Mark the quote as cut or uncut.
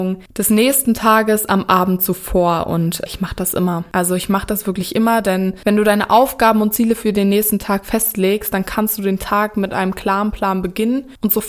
uncut